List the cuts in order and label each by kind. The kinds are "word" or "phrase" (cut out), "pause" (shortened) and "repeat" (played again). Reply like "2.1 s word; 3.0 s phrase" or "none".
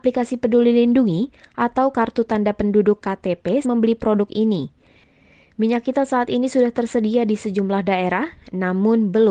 3.6 s word